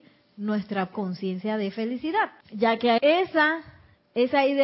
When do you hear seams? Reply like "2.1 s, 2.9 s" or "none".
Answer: 0.9 s, 2.4 s, 3.0 s

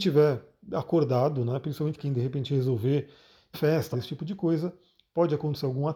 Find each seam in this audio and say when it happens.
2.0 s, 3.5 s, 3.9 s

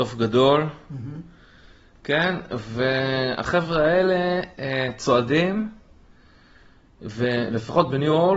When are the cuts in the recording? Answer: none

